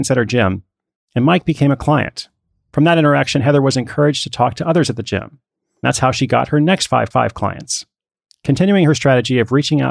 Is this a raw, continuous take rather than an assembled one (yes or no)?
no